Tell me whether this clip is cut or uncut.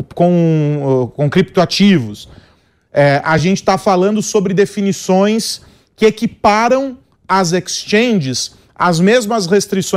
uncut